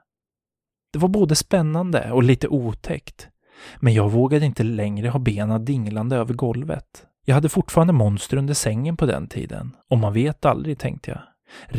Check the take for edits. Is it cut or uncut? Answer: cut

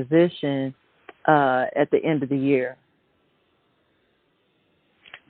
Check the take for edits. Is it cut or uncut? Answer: uncut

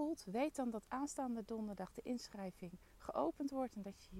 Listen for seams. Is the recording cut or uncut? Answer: uncut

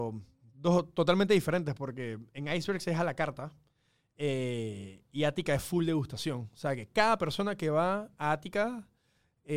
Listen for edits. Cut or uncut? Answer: uncut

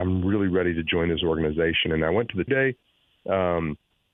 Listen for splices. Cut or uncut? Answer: cut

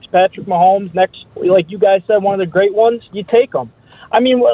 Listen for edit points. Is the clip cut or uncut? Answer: cut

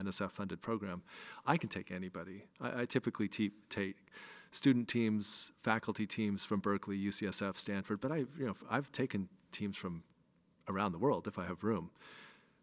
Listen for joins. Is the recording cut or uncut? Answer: uncut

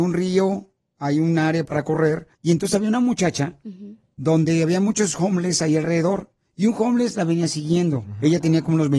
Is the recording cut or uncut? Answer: cut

